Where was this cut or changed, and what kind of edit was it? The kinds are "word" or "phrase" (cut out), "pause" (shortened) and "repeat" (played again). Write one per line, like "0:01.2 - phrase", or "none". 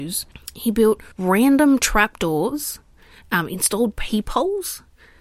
0:01.1 - pause